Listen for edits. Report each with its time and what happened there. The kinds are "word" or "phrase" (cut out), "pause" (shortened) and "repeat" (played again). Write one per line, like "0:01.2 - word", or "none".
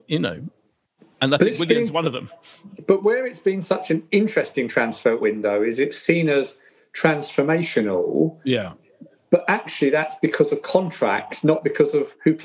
none

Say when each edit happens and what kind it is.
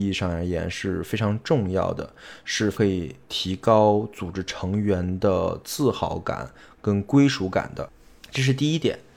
none

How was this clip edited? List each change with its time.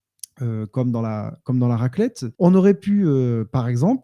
0:02.3 - pause

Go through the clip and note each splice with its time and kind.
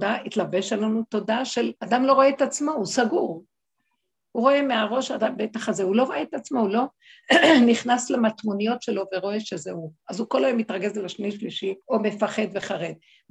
0:01.8 - pause
0:11.8 - pause

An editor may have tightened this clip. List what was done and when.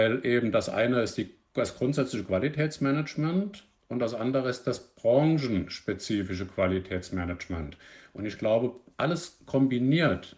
none

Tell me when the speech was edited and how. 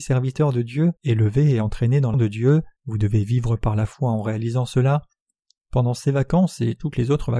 0:01.0 - pause
0:02.1 - word
0:02.8 - pause

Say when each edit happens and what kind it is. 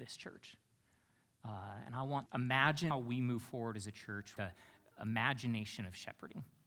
0:02.3 - word
0:02.9 - word
0:04.4 - word

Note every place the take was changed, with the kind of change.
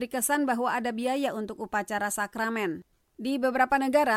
0:03.0 - pause

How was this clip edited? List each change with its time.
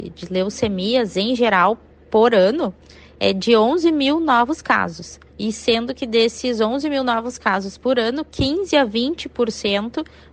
0:05.3 - pause

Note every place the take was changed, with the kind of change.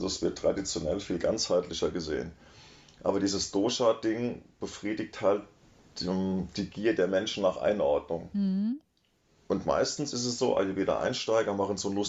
none

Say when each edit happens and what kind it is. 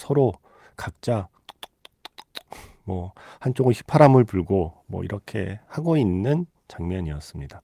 none

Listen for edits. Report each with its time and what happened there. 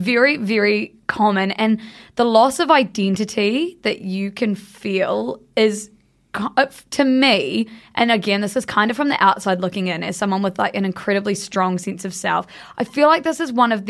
none

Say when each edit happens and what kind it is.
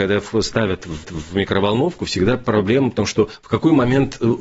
0:01.0 - repeat

